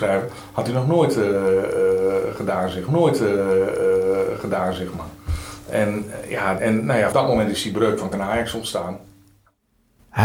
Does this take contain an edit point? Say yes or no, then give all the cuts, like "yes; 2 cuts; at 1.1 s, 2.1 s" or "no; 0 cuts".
yes; 4 cuts; at 2.9 s, 6.6 s, 7.1 s, 8.1 s